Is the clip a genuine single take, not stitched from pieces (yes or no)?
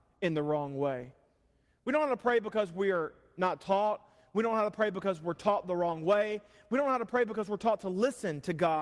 yes